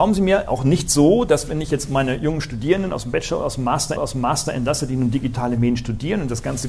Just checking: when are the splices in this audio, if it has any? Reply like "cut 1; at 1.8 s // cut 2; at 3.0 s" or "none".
cut 1; at 4.0 s